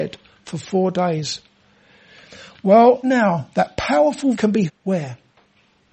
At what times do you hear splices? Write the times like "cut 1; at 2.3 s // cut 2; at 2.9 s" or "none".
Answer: cut 1; at 3.0 s // cut 2; at 4.3 s // cut 3; at 4.7 s